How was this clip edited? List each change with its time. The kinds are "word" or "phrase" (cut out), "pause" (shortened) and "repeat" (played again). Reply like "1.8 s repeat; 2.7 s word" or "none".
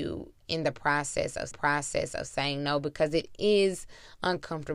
1.5 s repeat